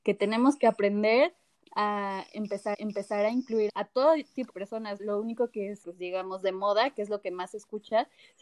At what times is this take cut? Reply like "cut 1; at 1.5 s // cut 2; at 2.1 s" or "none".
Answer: cut 1; at 2.7 s // cut 2; at 3.7 s // cut 3; at 4.5 s // cut 4; at 5.0 s // cut 5; at 5.8 s